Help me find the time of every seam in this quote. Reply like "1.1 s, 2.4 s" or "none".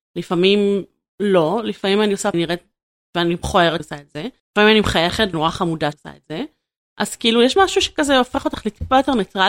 2.3 s, 3.8 s, 4.4 s, 5.3 s, 5.9 s, 7.6 s